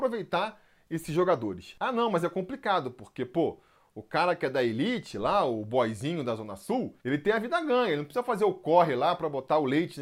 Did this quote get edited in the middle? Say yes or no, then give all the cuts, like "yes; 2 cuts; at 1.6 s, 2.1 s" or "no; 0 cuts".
no; 0 cuts